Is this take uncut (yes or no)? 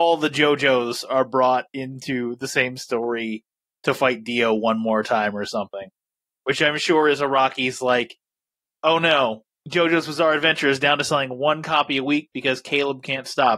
yes